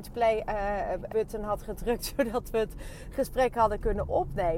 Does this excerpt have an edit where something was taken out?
yes; 1 cut; at 1.1 s

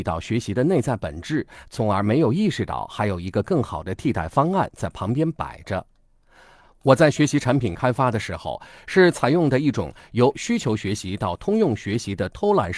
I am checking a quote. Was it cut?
no; 0 cuts

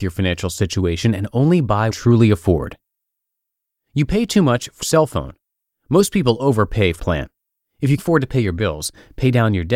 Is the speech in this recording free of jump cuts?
no; 5 cuts; at 1.9 s, 4.8 s, 5.6 s, 7.0 s, 8.0 s

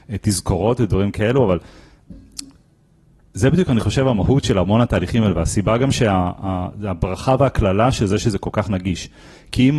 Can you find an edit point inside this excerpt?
no; 0 cuts

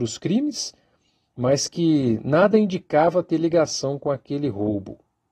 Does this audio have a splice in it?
no; 0 cuts

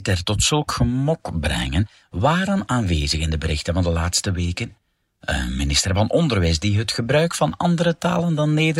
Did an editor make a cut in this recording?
no; 0 cuts

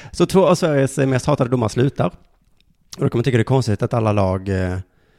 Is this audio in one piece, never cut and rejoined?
yes; 0 cuts

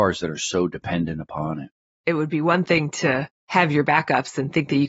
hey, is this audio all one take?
yes; 0 cuts

